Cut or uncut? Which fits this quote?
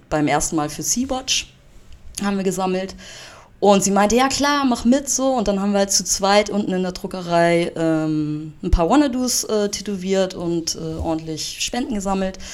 uncut